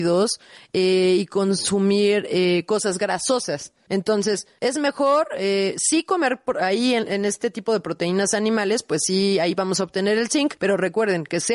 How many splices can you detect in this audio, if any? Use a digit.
0